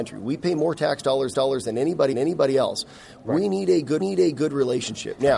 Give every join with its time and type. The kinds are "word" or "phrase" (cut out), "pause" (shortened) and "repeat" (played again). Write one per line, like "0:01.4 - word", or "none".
0:01.3 - repeat
0:02.1 - repeat
0:04.0 - repeat

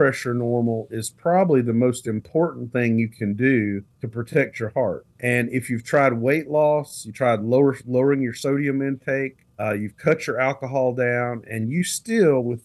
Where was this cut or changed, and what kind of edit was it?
0:03.9 - pause
0:05.1 - pause
0:09.5 - pause

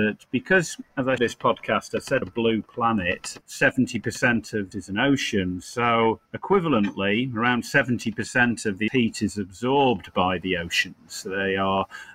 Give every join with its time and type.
0:01.2 - word
0:02.2 - word
0:03.4 - pause
0:04.7 - phrase
0:06.3 - pause
0:08.9 - word

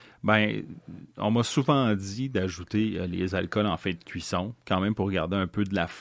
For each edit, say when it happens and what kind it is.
0:04.6 - pause

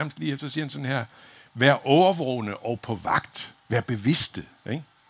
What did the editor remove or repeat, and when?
0:03.6 - pause

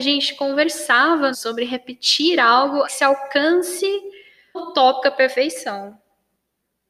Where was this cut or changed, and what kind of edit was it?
0:01.3 - phrase
0:02.8 - word
0:04.5 - word

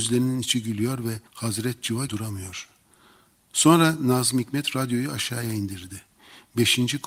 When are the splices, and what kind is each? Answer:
0:01.3 - pause
0:02.1 - phrase

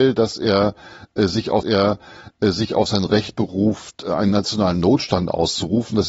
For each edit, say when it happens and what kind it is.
0:01.6 - repeat

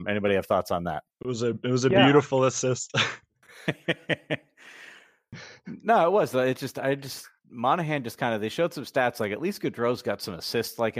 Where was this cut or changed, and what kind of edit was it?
0:01.1 - pause

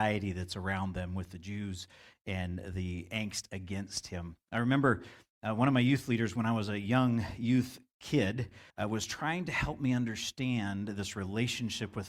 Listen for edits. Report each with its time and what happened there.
0:08.7 - pause

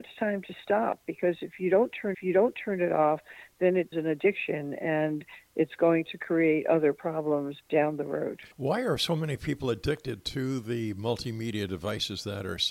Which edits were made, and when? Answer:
0:02.1 - repeat
0:03.9 - word
0:07.6 - pause
0:08.5 - pause

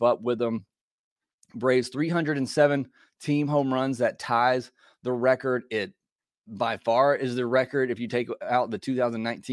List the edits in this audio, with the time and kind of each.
none

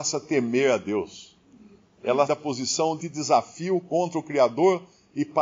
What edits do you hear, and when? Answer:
0:02.3 - word
0:03.0 - word

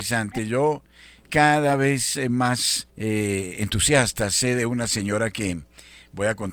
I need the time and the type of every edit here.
0:01.2 - word
0:02.9 - pause

